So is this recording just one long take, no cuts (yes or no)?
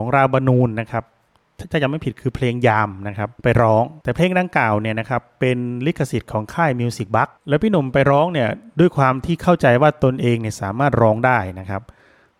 no